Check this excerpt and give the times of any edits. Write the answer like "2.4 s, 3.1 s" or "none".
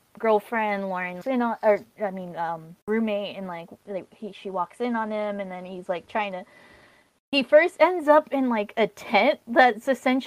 1.2 s, 2.8 s